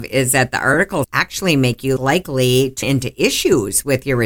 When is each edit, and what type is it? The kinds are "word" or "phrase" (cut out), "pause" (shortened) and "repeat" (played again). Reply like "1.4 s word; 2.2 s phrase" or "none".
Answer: 1.0 s phrase; 2.0 s word; 2.8 s word